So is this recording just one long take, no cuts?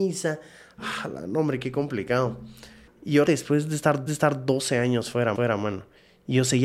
no; 4 cuts; at 2.9 s, 3.2 s, 4.1 s, 5.3 s

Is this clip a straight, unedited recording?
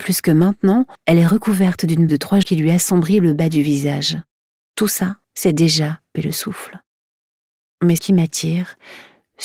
no; 7 cuts; at 0.9 s, 2.1 s, 2.4 s, 4.4 s, 5.2 s, 6.2 s, 8.0 s

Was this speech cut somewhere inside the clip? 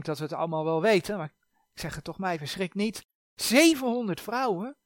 no; 0 cuts

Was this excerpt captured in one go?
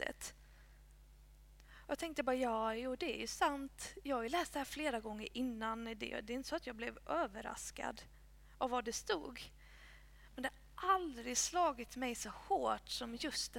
yes; 0 cuts

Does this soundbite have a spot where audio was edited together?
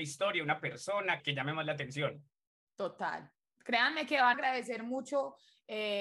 yes; 2 cuts; at 1.2 s, 4.3 s

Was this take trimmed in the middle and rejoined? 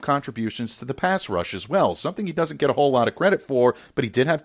no; 0 cuts

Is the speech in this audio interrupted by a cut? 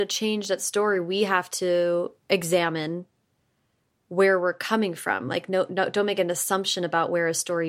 no; 0 cuts

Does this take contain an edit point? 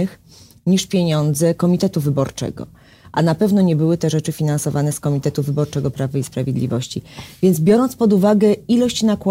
no; 0 cuts

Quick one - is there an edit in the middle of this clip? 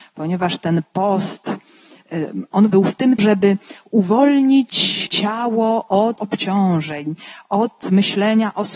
yes; 4 cuts; at 2.7 s, 3.2 s, 5.1 s, 6.2 s

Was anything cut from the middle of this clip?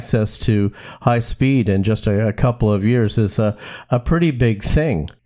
no; 0 cuts

